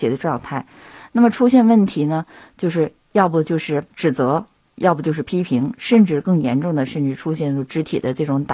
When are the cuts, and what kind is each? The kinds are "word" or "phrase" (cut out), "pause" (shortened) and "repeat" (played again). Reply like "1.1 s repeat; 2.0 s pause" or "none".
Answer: 3.9 s pause